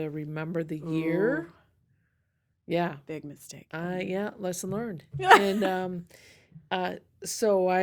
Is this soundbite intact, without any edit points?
yes; 0 cuts

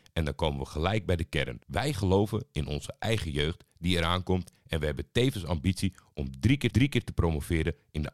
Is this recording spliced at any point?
yes; 2 cuts; at 1.6 s, 6.7 s

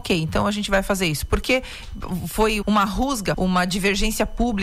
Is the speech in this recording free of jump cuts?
no; 2 cuts; at 2.6 s, 3.3 s

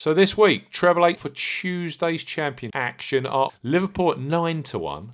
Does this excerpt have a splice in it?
yes; 3 cuts; at 1.2 s, 2.7 s, 3.5 s

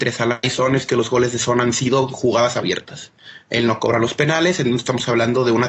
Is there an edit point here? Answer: no; 0 cuts

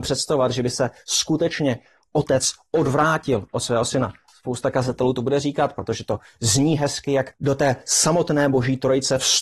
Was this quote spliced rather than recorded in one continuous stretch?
no; 0 cuts

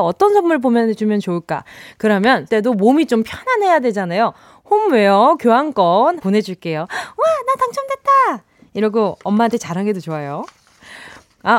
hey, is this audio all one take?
no; 2 cuts; at 2.5 s, 6.2 s

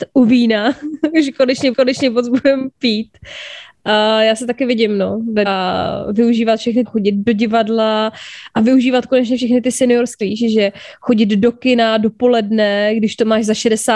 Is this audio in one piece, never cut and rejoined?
no; 4 cuts; at 1.7 s, 5.5 s, 6.9 s, 10.2 s

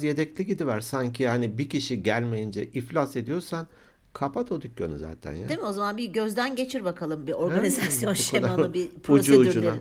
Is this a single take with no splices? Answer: yes; 0 cuts

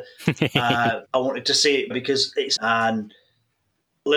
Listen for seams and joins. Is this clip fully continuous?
no; 3 cuts; at 1.1 s, 1.9 s, 2.6 s

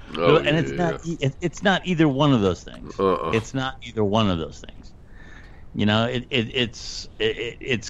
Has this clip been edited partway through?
no; 0 cuts

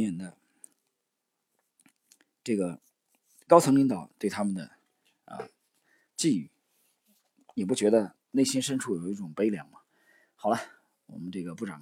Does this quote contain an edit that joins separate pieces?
no; 0 cuts

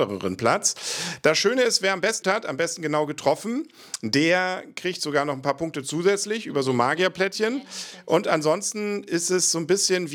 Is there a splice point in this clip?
yes; 1 cut; at 2.2 s

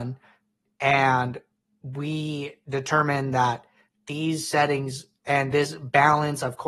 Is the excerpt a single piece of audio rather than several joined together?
yes; 0 cuts

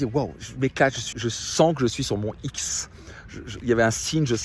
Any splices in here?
yes; 1 cut; at 1.1 s

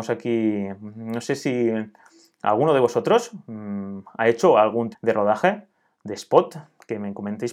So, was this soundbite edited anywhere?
yes; 1 cut; at 4.9 s

